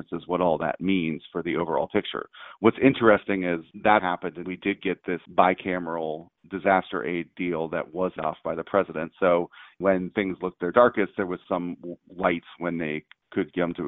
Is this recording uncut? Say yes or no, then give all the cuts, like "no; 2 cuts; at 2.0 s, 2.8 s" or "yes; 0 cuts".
no; 6 cuts; at 4.0 s, 4.4 s, 5.3 s, 8.2 s, 9.8 s, 11.5 s